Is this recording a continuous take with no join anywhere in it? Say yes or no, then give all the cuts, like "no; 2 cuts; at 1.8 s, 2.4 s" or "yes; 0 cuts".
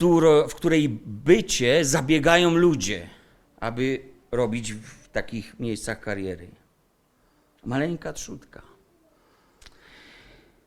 yes; 0 cuts